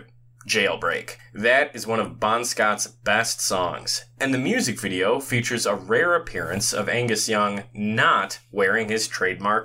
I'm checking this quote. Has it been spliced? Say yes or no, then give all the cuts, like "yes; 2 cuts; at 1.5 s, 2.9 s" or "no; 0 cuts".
yes; 1 cut; at 1.2 s